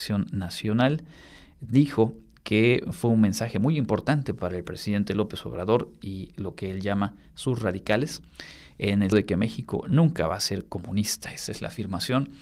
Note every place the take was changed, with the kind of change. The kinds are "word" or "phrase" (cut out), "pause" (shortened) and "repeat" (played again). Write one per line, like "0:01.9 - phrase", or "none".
0:09.1 - word